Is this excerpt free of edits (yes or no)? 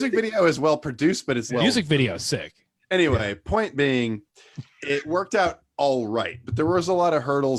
no